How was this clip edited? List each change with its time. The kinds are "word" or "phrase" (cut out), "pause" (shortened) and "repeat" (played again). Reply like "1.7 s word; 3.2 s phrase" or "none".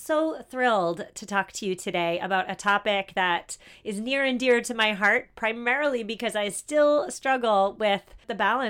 none